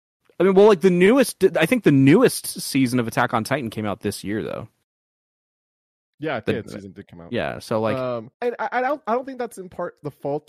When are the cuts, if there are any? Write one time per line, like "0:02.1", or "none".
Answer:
0:06.6
0:08.3